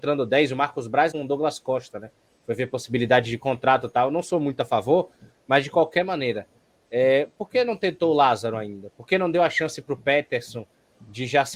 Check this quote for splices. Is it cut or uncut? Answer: cut